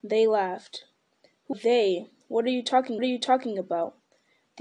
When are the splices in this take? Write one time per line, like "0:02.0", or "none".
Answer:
0:01.5
0:03.0